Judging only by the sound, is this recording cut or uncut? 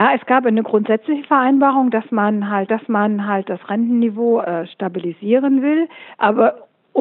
cut